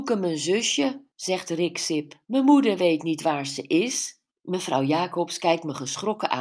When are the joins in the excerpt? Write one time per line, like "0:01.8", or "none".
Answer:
0:01.1
0:02.2
0:04.3